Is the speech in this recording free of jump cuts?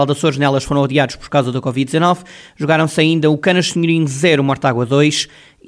yes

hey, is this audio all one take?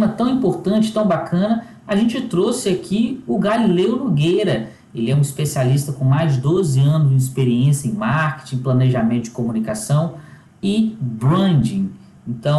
yes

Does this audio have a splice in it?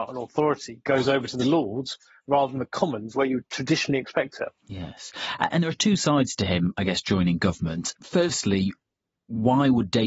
yes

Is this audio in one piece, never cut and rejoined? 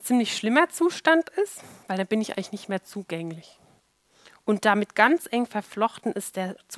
no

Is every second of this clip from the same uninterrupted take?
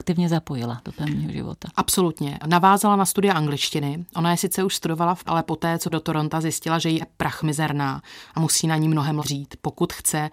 no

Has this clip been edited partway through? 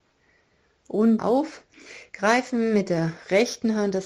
yes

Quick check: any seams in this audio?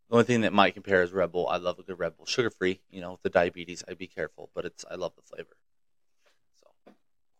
no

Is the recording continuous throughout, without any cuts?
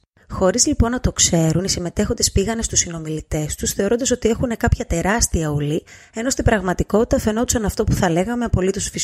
yes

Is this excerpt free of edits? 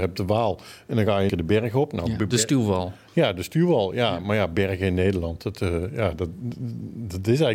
no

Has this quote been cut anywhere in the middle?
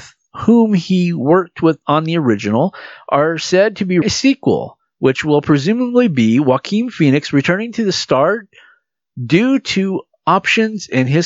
yes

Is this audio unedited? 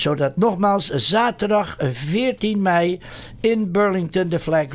yes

